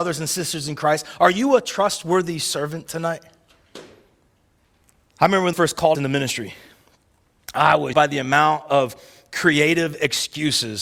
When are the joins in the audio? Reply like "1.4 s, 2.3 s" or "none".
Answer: 4.8 s, 5.5 s, 5.9 s, 7.9 s